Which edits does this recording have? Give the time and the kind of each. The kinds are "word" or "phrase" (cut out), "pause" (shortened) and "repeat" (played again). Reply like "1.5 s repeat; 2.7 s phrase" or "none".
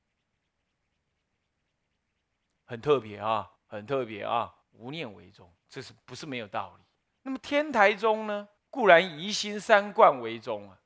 3.6 s pause; 4.6 s pause; 5.6 s pause; 7.1 s pause; 8.6 s pause